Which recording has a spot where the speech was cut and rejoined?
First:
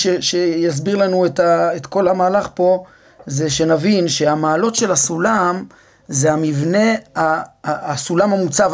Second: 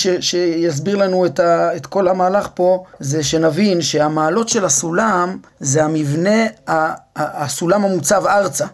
second; 2 cuts; at 2.9 s, 5.5 s

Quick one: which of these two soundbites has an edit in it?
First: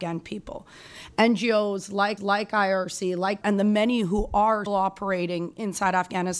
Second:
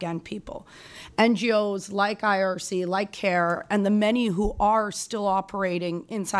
first; 3 cuts; at 2.2 s, 3.4 s, 4.7 s

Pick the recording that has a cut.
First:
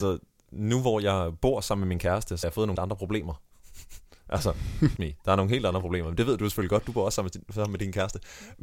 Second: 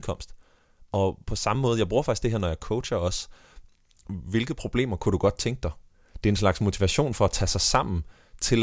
first; 3 cuts; at 2.4 s, 2.7 s, 5.0 s

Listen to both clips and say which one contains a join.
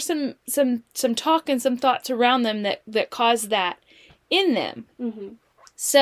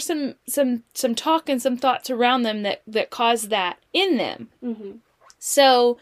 second; 1 cut; at 3.9 s

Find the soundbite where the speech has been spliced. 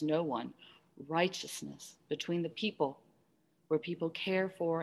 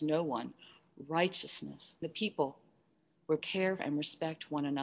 second; 3 cuts; at 2.0 s, 3.4 s, 3.8 s

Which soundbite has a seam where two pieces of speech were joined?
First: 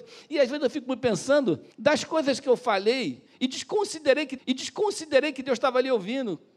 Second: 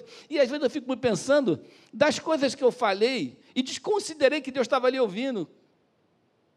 first; 2 cuts; at 1.7 s, 4.4 s

